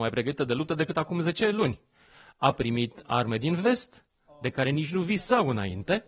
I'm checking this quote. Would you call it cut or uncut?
uncut